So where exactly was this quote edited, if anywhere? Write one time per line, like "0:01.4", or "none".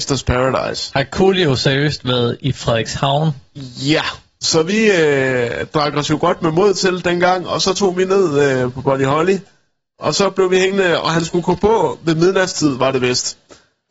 none